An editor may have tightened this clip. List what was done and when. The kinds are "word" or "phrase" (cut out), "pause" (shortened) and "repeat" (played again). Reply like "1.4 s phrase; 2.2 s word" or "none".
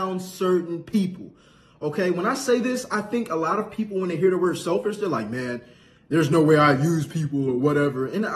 none